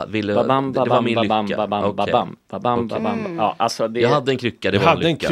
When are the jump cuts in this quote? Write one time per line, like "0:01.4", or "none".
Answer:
none